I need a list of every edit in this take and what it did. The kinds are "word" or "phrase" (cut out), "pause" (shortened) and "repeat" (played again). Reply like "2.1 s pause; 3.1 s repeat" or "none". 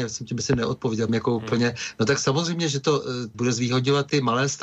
1.1 s word; 3.3 s word